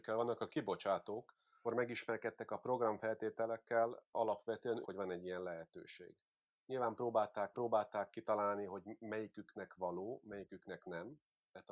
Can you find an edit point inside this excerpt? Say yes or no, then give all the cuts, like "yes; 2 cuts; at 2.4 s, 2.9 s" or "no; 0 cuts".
yes; 3 cuts; at 1.6 s, 4.8 s, 7.5 s